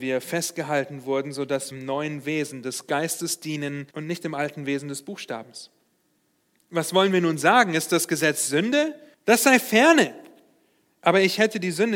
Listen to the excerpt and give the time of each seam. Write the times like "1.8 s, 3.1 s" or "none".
1.7 s, 3.9 s, 9.1 s